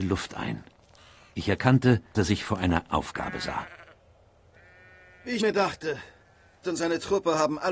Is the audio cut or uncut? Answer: cut